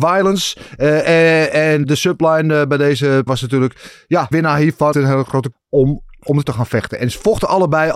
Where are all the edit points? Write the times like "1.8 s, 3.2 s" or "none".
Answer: 1.8 s, 3.3 s, 4.3 s, 4.9 s, 5.5 s, 6.4 s